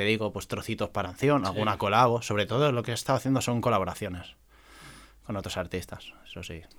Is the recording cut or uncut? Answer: cut